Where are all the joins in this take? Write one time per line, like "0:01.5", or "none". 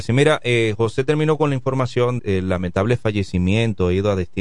0:02.2

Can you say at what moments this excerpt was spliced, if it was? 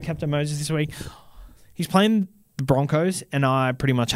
none

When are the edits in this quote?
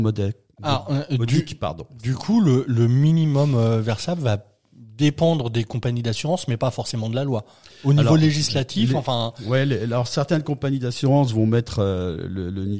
none

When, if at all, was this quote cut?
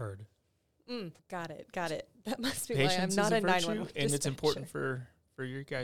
0:01.2

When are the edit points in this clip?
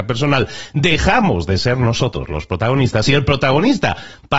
none

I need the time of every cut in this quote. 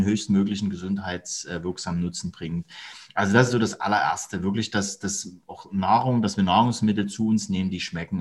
none

